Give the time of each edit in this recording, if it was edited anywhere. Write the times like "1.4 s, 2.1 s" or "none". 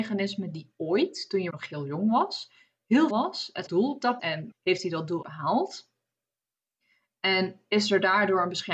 1.5 s, 3.1 s, 3.7 s, 4.2 s, 4.5 s, 5.2 s